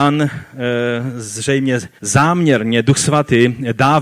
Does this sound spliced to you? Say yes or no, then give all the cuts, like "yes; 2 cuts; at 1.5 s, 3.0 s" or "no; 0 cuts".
yes; 1 cut; at 2.0 s